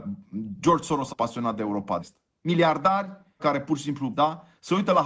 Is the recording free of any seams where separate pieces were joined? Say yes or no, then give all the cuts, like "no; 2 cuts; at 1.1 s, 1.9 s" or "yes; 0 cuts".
no; 4 cuts; at 1.1 s, 2.0 s, 3.4 s, 4.1 s